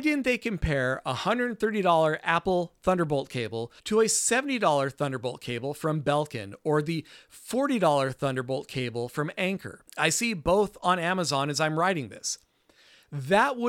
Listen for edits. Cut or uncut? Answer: cut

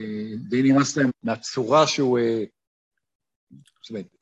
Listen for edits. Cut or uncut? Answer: cut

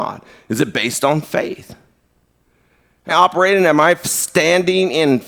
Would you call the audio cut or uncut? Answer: cut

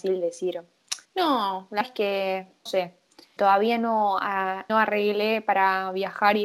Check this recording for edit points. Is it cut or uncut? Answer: cut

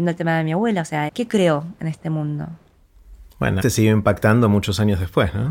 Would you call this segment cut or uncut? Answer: cut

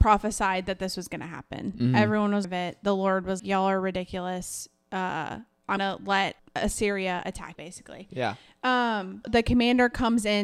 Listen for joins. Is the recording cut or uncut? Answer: cut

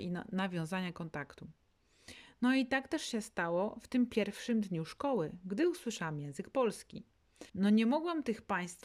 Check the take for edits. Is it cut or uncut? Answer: cut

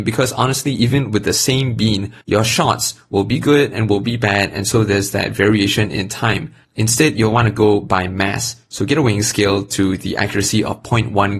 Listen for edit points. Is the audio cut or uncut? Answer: cut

